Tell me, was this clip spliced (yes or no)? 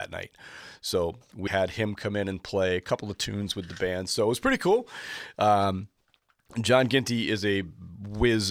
yes